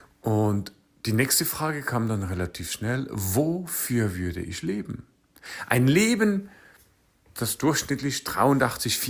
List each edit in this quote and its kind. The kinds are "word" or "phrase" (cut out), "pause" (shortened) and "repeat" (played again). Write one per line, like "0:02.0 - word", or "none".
none